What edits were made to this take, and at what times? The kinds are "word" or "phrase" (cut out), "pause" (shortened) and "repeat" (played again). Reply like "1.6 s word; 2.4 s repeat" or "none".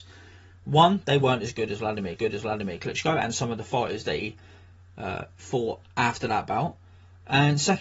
2.2 s repeat